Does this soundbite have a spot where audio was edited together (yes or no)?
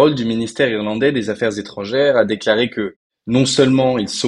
no